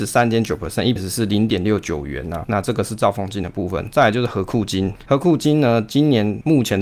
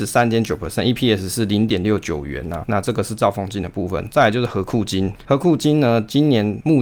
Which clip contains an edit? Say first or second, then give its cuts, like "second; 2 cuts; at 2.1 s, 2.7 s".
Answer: first; 1 cut; at 1.0 s